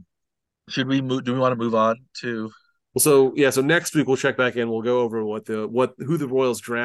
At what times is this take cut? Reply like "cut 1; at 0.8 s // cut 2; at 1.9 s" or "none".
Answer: none